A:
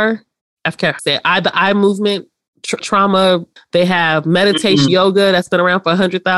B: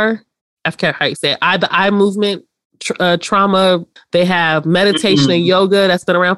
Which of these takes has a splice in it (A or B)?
A